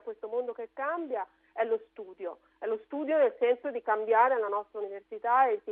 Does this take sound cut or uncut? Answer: uncut